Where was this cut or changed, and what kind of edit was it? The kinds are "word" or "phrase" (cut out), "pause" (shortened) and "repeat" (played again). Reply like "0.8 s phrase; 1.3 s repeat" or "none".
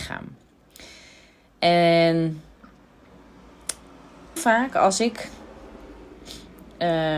4.4 s word

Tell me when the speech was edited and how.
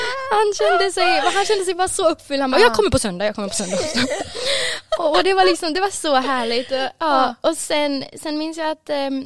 none

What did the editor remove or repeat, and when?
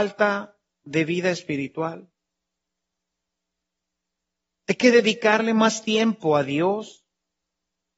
none

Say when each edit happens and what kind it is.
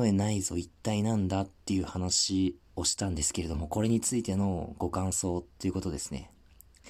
2.6 s pause

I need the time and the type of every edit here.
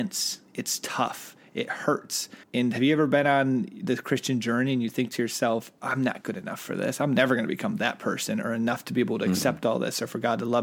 2.4 s pause

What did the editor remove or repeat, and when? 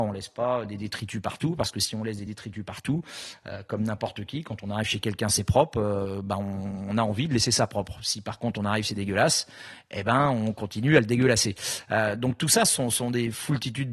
none

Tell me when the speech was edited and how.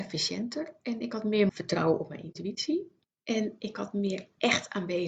1.5 s word; 3.0 s pause

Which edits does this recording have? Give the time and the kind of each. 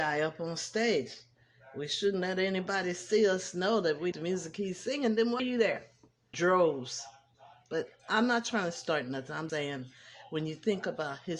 4.1 s word; 5.4 s word; 6.3 s word; 9.5 s word

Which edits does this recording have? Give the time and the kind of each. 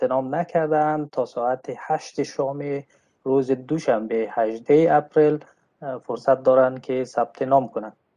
none

